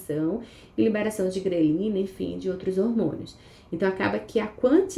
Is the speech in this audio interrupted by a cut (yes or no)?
no